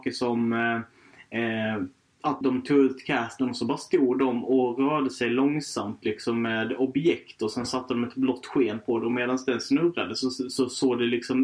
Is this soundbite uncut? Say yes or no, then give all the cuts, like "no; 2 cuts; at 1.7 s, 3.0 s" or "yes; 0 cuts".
no; 1 cut; at 2.4 s